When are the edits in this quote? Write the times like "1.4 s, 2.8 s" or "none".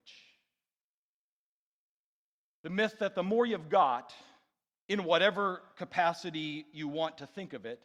none